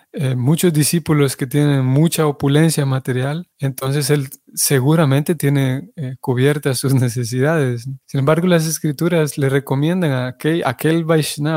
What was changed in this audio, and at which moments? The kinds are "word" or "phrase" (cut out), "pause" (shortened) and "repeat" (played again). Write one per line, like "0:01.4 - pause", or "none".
0:03.5 - pause
0:08.0 - pause